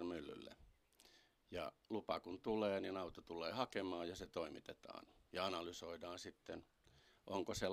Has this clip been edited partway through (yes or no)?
no